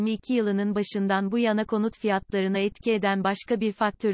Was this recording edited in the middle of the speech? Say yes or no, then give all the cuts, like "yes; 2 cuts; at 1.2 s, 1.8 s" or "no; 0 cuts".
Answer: no; 0 cuts